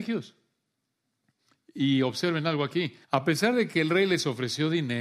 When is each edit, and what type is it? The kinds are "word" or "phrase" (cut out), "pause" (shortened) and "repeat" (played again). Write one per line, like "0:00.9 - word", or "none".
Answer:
0:03.0 - pause